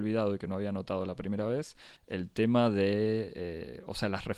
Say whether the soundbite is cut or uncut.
cut